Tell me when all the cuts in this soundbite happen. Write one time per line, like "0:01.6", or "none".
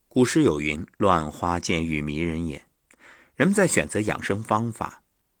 0:02.7